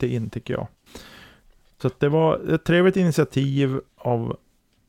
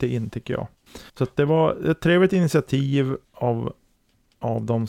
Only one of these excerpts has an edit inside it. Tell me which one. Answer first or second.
second